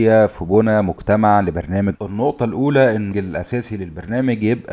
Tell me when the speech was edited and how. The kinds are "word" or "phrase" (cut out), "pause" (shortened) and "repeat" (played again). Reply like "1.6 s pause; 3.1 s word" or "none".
1.9 s word; 3.1 s word